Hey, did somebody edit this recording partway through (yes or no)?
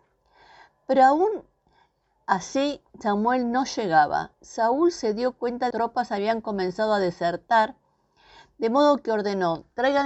yes